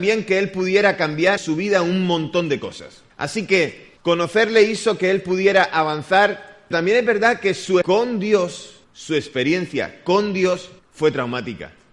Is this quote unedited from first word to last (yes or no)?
no